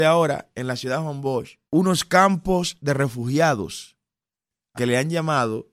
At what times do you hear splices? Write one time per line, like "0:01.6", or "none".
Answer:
0:01.7
0:04.7